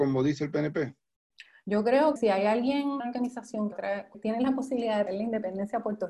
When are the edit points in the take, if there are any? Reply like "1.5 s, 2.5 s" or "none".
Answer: 2.2 s, 3.0 s, 3.7 s, 4.1 s, 5.1 s